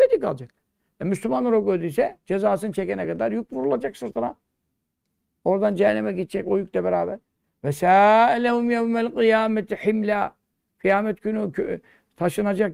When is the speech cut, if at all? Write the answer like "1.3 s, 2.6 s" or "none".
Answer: none